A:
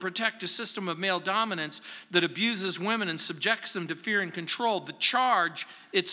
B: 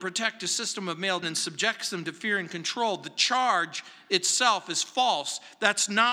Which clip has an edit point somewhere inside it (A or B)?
B